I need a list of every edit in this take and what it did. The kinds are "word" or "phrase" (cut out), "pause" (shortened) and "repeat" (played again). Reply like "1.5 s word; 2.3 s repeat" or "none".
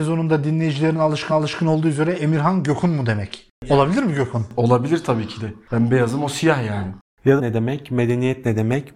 1.3 s repeat; 7.4 s phrase